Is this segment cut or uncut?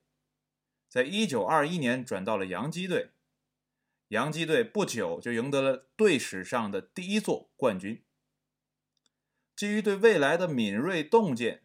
uncut